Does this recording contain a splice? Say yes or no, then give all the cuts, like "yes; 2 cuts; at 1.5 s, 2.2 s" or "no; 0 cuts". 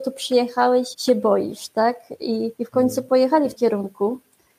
yes; 3 cuts; at 0.9 s, 2.6 s, 3.6 s